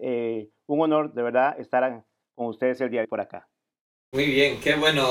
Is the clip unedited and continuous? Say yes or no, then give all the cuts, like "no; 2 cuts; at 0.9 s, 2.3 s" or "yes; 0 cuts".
no; 1 cut; at 3.0 s